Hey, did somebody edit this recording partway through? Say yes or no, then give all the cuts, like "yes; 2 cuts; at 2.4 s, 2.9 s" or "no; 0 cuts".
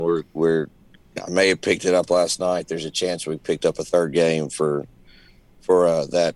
no; 0 cuts